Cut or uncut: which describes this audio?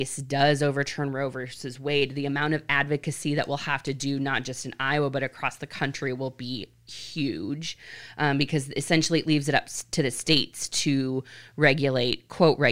uncut